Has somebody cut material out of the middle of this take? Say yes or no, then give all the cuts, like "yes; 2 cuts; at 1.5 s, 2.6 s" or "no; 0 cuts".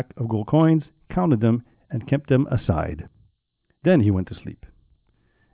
no; 0 cuts